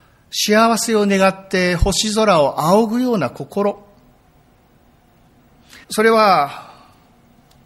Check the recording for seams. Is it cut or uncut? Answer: cut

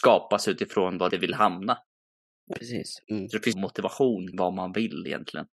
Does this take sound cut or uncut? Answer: cut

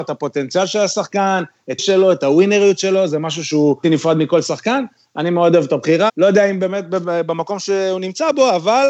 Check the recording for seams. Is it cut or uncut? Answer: cut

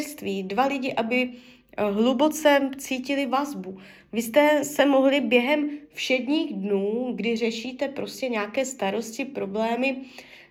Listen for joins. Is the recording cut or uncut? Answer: uncut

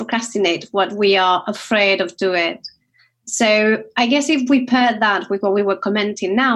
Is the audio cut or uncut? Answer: uncut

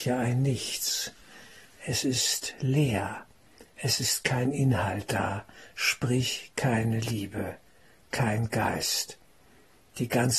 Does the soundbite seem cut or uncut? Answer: uncut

